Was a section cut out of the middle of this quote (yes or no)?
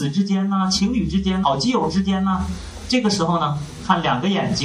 yes